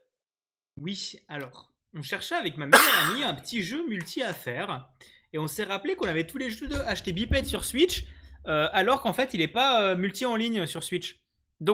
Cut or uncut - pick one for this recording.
uncut